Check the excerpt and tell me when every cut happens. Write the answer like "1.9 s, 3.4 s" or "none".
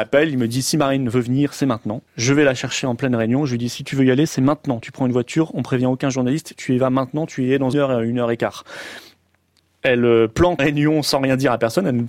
2.1 s, 7.7 s, 10.6 s

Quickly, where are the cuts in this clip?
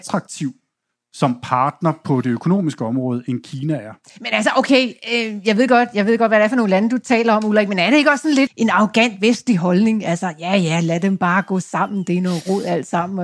8.5 s

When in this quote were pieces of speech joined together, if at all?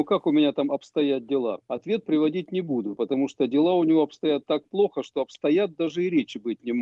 1.6 s

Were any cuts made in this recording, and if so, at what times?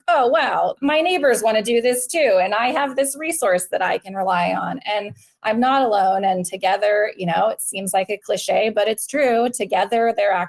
none

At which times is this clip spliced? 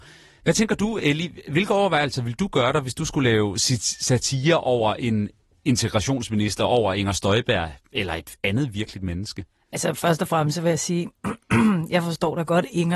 none

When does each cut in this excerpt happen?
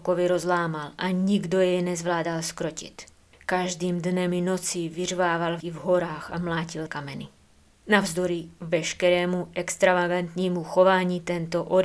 5.6 s, 6.9 s

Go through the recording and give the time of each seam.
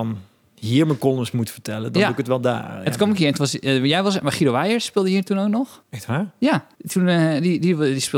5.8 s, 6.7 s

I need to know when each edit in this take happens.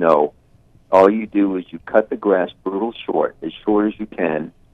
none

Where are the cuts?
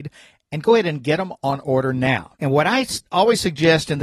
2.4 s, 3.1 s

